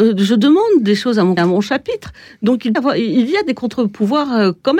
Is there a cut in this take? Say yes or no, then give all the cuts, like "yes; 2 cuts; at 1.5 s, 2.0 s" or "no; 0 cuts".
yes; 2 cuts; at 1.4 s, 2.7 s